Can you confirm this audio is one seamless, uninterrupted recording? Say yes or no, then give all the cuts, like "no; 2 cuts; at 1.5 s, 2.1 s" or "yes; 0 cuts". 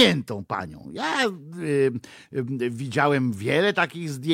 yes; 0 cuts